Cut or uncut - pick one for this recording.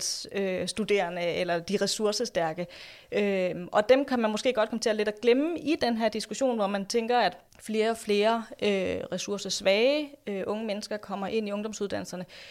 cut